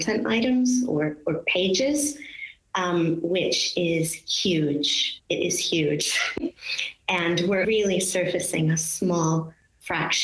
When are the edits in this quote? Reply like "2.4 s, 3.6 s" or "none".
7.6 s